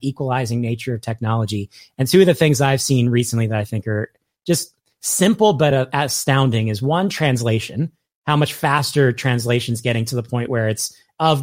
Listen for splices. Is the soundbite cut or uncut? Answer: uncut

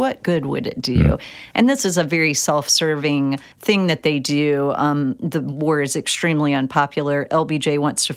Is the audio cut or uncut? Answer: cut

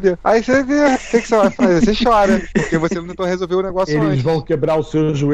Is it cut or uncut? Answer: uncut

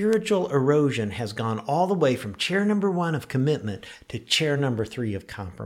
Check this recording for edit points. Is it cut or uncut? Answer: uncut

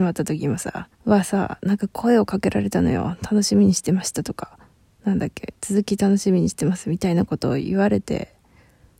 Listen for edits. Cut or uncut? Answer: cut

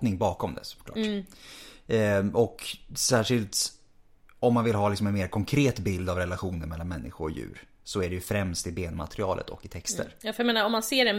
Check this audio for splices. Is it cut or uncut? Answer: uncut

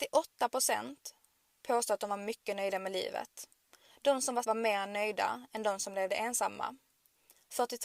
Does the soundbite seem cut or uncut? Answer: cut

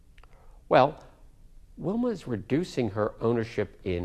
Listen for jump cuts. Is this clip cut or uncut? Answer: uncut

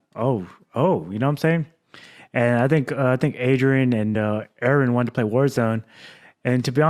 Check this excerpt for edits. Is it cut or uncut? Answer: uncut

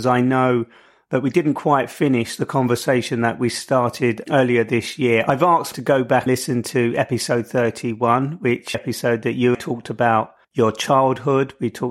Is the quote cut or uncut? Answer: cut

